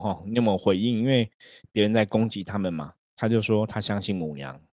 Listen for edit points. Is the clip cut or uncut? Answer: cut